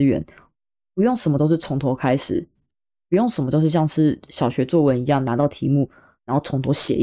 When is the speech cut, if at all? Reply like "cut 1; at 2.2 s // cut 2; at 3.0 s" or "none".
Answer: none

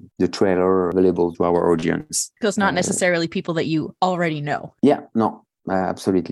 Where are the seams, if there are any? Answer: cut 1; at 1.3 s

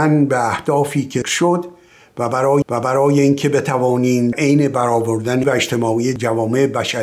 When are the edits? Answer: cut 1; at 1.2 s // cut 2; at 2.6 s // cut 3; at 4.3 s // cut 4; at 5.4 s

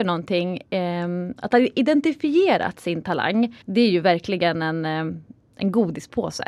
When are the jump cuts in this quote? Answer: cut 1; at 3.6 s

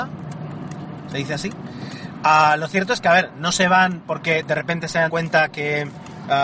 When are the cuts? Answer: cut 1; at 5.1 s

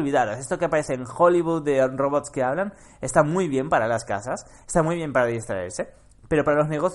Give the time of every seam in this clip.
none

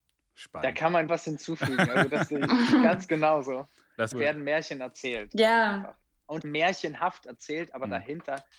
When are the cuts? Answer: cut 1; at 1.1 s // cut 2; at 4.1 s // cut 3; at 6.4 s

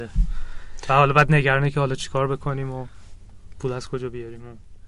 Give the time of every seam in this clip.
none

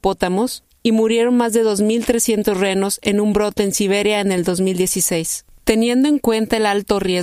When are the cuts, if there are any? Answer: none

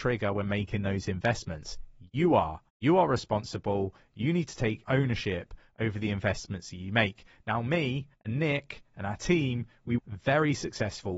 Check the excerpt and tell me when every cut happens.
cut 1; at 2.7 s // cut 2; at 4.8 s // cut 3; at 8.1 s // cut 4; at 10.0 s

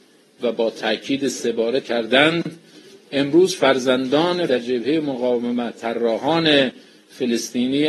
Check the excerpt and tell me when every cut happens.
cut 1; at 1.8 s // cut 2; at 4.5 s // cut 3; at 5.7 s

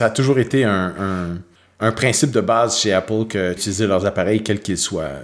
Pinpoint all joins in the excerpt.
cut 1; at 1.6 s // cut 2; at 3.6 s

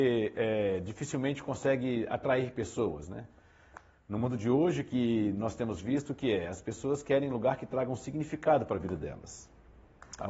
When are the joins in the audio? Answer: none

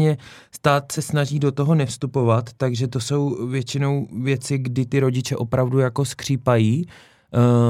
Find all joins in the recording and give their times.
none

